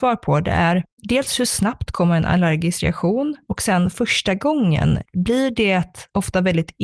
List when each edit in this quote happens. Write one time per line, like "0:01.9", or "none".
none